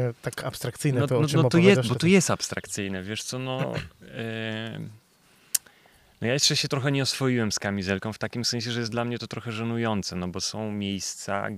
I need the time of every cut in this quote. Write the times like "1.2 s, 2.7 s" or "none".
none